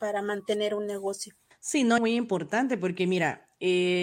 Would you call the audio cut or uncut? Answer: cut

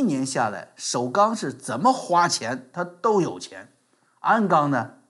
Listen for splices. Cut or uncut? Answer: uncut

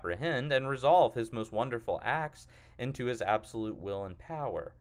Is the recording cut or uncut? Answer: uncut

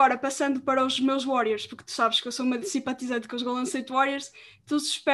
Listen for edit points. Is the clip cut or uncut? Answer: uncut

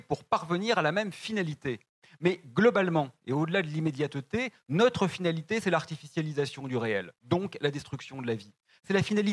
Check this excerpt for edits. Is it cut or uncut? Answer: uncut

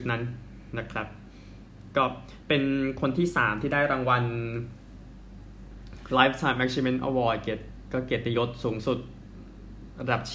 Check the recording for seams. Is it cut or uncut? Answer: uncut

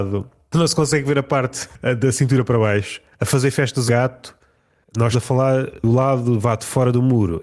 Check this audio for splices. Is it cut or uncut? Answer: cut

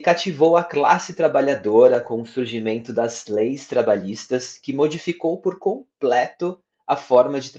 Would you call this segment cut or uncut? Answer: uncut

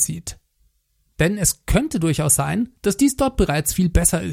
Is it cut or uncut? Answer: cut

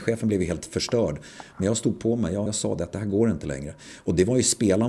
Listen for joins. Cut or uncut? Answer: cut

